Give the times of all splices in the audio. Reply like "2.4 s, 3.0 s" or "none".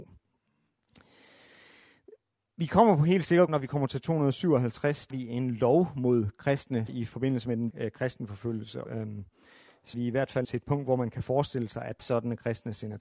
3.5 s, 5.1 s, 6.9 s, 7.7 s, 8.8 s, 9.9 s, 10.4 s, 12.0 s